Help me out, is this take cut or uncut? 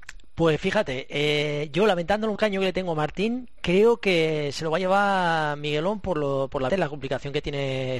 cut